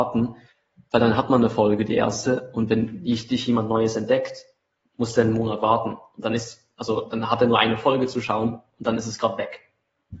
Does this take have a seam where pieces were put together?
no; 0 cuts

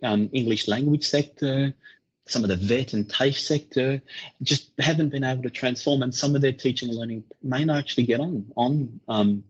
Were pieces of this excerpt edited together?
no; 0 cuts

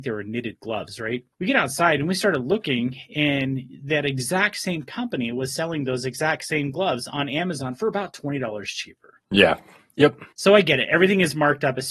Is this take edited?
yes; 3 cuts; at 1.3 s, 9.2 s, 10.3 s

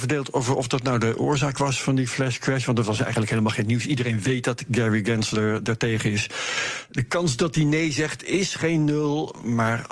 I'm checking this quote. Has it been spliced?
no; 0 cuts

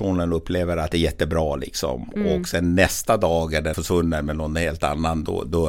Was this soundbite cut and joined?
yes; 2 cuts; at 0.9 s, 3.7 s

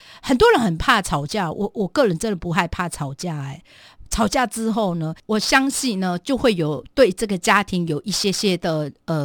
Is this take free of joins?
yes; 0 cuts

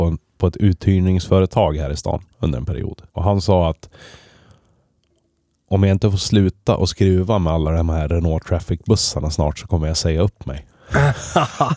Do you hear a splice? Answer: yes; 2 cuts; at 2.3 s, 3.1 s

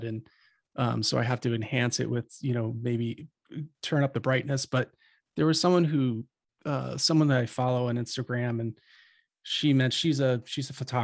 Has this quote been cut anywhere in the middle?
no; 0 cuts

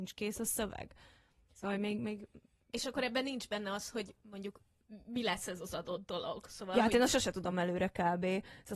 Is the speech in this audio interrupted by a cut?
no; 0 cuts

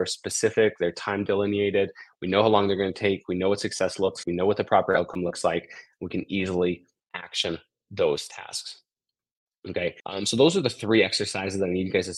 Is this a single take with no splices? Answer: no; 2 cuts; at 4.2 s, 10.0 s

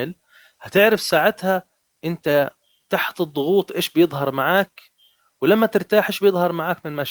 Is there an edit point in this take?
no; 0 cuts

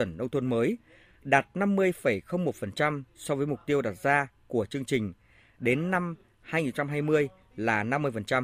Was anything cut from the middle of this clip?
no; 0 cuts

